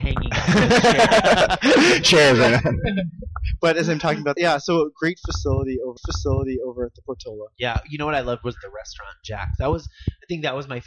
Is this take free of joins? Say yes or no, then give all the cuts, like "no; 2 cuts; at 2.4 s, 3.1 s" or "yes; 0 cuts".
no; 3 cuts; at 2.0 s, 4.4 s, 6.0 s